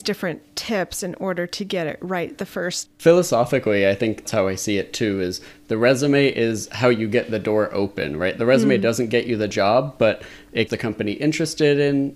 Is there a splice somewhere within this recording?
yes; 3 cuts; at 2.8 s, 4.2 s, 10.7 s

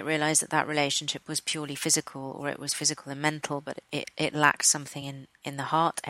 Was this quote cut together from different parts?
no; 0 cuts

